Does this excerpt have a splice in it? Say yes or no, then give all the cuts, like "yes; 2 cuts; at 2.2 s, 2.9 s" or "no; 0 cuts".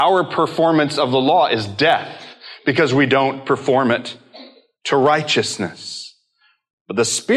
no; 0 cuts